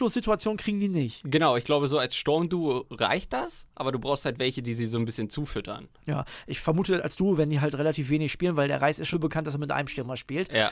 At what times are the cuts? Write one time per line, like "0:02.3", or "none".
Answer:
0:09.1